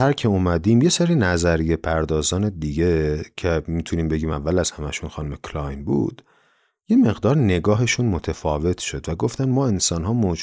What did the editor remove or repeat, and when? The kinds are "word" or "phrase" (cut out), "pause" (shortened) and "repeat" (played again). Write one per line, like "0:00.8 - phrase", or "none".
none